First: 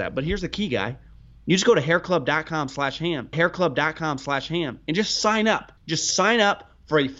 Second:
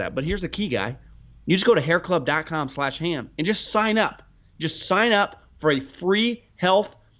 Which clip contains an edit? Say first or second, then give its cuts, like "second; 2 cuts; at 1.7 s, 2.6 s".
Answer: first; 2 cuts; at 3.3 s, 5.8 s